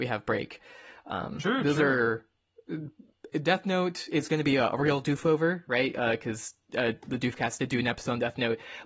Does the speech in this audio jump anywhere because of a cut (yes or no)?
no